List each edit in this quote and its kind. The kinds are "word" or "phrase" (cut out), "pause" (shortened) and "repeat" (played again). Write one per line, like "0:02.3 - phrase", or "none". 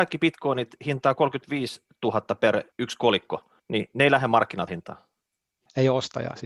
0:02.7 - pause
0:03.6 - pause
0:04.7 - word